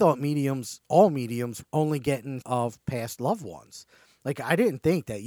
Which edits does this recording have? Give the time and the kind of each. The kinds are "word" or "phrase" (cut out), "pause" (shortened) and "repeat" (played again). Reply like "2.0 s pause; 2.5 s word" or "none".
1.6 s word; 2.4 s word